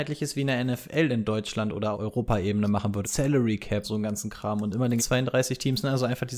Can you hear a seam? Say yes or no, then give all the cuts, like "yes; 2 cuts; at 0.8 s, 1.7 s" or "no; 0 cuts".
yes; 4 cuts; at 1.9 s, 3.0 s, 3.8 s, 5.0 s